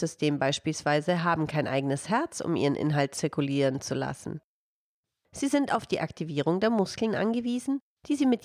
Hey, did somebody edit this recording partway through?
no; 0 cuts

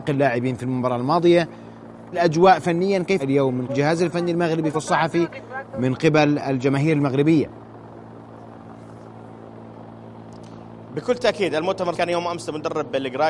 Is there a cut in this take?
yes; 5 cuts; at 2.1 s, 3.2 s, 3.7 s, 4.7 s, 11.9 s

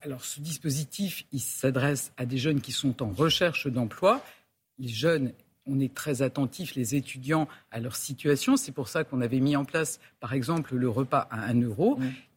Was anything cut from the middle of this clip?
no; 0 cuts

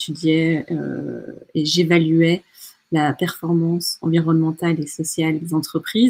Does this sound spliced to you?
no; 0 cuts

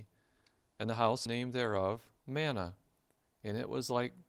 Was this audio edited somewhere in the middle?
yes; 2 cuts; at 1.3 s, 2.2 s

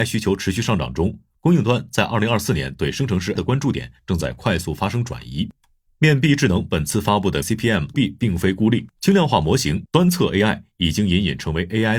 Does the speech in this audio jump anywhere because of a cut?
yes; 3 cuts; at 3.4 s, 7.4 s, 7.9 s

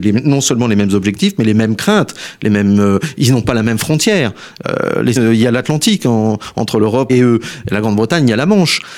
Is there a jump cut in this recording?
yes; 2 cuts; at 5.2 s, 7.1 s

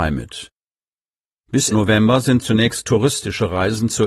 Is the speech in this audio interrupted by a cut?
yes; 2 cuts; at 1.7 s, 2.4 s

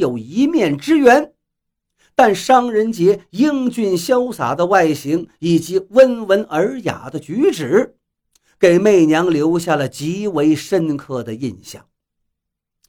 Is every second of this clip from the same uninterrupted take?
yes; 0 cuts

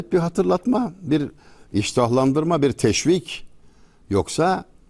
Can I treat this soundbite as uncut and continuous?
yes; 0 cuts

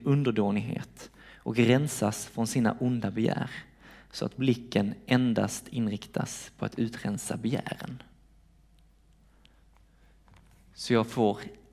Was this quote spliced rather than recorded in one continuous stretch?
no; 0 cuts

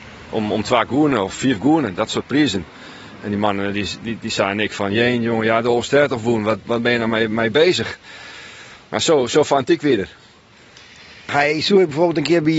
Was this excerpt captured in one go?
yes; 0 cuts

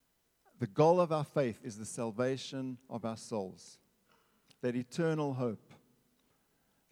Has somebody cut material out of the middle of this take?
no; 0 cuts

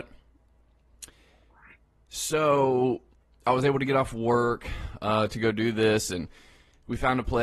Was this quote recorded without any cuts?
yes; 0 cuts

